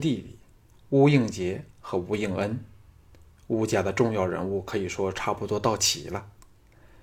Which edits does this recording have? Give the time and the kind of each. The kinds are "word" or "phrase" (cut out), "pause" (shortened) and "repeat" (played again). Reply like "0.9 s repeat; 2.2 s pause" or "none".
none